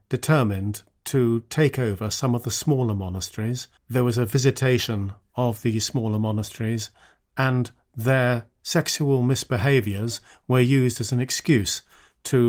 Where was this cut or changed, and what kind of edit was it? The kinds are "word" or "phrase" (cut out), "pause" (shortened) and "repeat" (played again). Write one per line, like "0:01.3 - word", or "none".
0:03.8 - pause